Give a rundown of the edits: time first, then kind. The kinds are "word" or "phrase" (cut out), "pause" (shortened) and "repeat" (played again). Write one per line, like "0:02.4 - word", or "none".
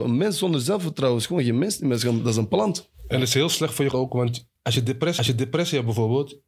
0:03.9 - word
0:04.6 - pause
0:05.2 - repeat